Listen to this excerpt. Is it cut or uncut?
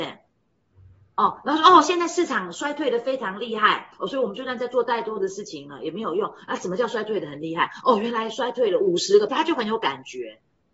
cut